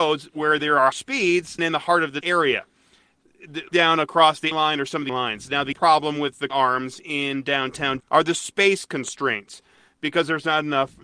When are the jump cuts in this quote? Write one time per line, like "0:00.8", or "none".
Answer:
0:00.9
0:01.6
0:02.2
0:03.7
0:04.5
0:05.1
0:05.7
0:06.5
0:08.0

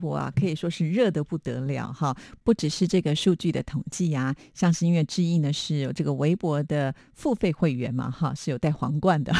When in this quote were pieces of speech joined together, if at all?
none

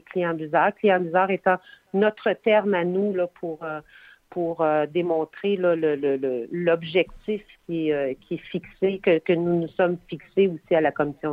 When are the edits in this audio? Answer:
none

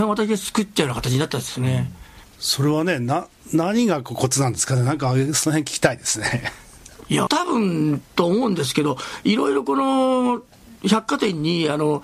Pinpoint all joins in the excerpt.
0:07.3
0:10.8

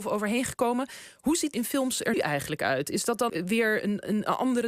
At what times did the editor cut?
0:01.5
0:02.1
0:03.3

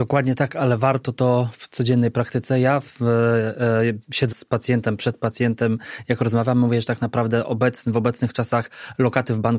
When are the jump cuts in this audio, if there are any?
0:04.3
0:05.0

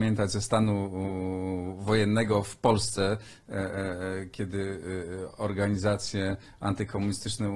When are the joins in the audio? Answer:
none

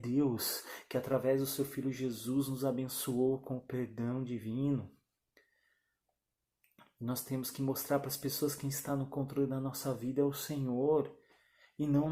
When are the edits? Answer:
none

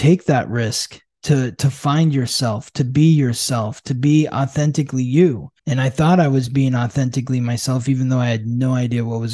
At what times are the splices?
0:05.6

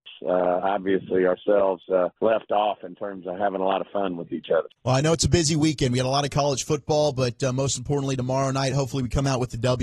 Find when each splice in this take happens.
0:02.2
0:04.8

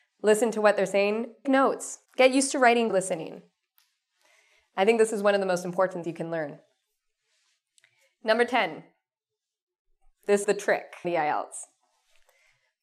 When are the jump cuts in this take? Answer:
0:01.4
0:02.1
0:02.9
0:06.0
0:10.4
0:11.0

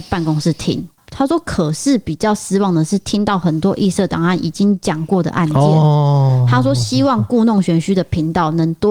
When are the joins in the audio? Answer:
none

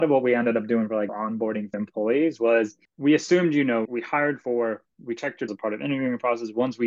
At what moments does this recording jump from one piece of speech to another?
0:01.1
0:01.7
0:02.8
0:03.8
0:05.5

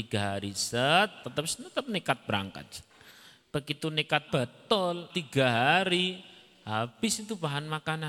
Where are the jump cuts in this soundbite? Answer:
0:01.2
0:04.3
0:05.1

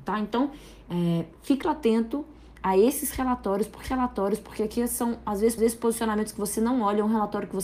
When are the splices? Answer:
0:01.6
0:03.8
0:05.6

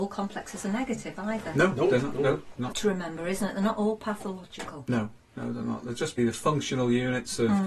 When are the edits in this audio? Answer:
0:02.7
0:06.2

